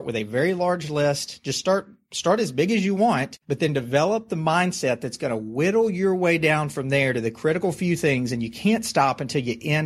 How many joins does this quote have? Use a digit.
1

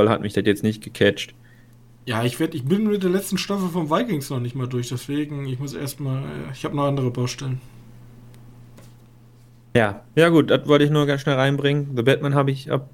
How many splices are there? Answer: 0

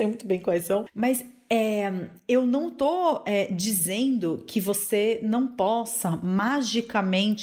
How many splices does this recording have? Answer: 0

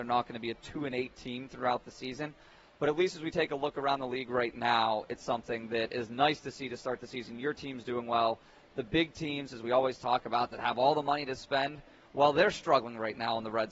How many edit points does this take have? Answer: 0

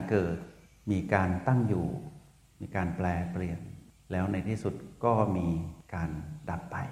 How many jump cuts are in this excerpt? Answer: 0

